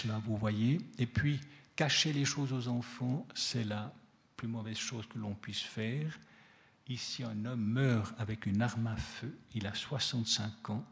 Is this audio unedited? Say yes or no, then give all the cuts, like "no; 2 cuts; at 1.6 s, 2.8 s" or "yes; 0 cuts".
yes; 0 cuts